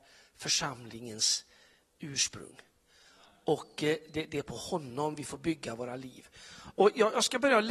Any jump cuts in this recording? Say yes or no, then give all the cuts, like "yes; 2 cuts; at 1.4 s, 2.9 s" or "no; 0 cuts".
no; 0 cuts